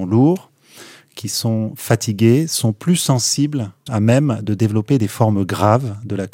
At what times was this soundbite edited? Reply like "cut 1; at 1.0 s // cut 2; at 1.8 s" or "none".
cut 1; at 3.9 s